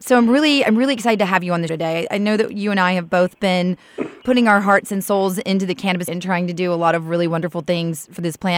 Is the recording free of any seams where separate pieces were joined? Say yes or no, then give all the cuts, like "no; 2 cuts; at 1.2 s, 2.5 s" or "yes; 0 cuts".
no; 3 cuts; at 1.7 s, 4.2 s, 6.1 s